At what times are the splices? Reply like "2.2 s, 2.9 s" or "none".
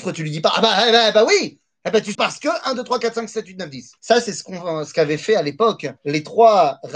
2.1 s, 4.0 s, 6.0 s